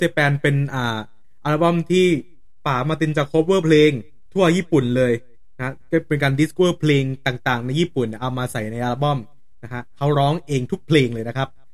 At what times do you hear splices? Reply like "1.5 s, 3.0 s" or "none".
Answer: 6.6 s